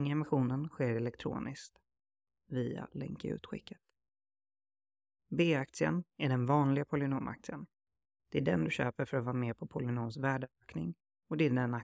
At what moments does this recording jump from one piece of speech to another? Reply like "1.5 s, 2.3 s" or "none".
none